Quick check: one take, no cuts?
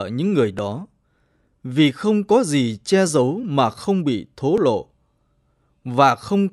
yes; 0 cuts

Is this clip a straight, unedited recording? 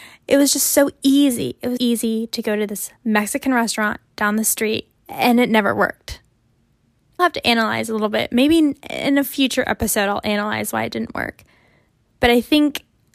no; 4 cuts; at 1.8 s, 3.0 s, 5.0 s, 7.2 s

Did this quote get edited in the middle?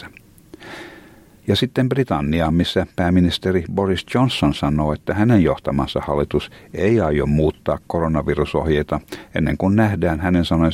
no; 0 cuts

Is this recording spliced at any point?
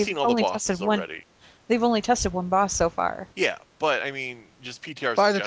yes; 1 cut; at 3.3 s

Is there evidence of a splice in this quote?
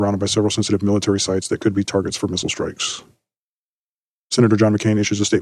no; 0 cuts

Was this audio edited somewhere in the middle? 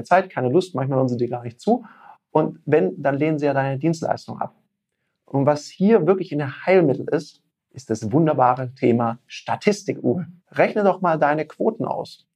yes; 2 cuts; at 7.6 s, 10.4 s

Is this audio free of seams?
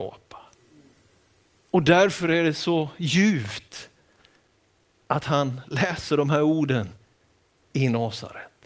yes; 0 cuts

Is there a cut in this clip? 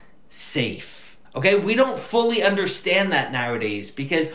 yes; 1 cut; at 1.2 s

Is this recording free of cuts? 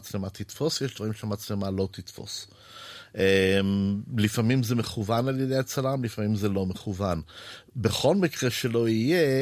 yes; 0 cuts

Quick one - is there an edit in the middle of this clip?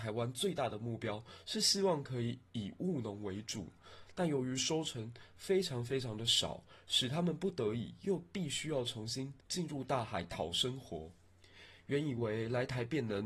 no; 0 cuts

